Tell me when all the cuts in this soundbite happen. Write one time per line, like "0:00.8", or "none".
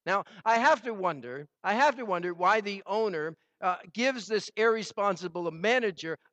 0:01.5